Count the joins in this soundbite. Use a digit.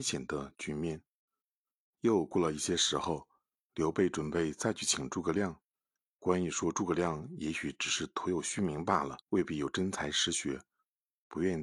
1